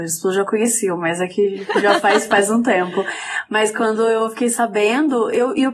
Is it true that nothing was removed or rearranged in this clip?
yes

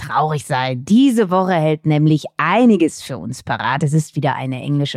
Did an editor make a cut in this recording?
no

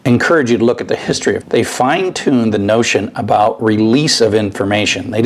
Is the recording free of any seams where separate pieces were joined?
no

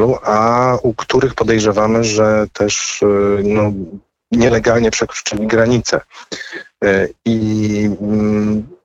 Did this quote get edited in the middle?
no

